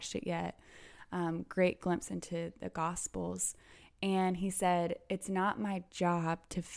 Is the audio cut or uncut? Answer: uncut